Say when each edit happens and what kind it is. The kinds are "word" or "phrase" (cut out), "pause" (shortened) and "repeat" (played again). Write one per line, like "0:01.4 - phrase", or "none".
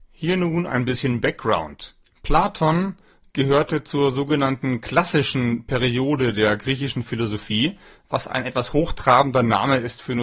0:02.1 - pause